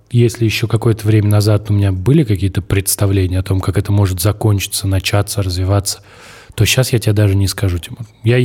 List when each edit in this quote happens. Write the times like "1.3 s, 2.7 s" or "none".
none